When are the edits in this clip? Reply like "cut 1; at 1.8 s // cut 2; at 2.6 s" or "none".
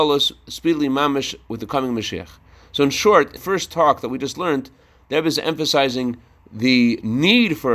cut 1; at 3.4 s